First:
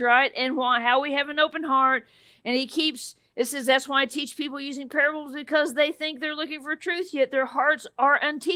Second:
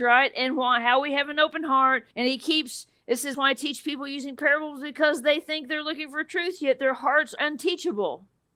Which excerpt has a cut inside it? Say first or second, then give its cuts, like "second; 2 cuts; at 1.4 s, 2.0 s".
second; 3 cuts; at 2.1 s, 3.3 s, 7.4 s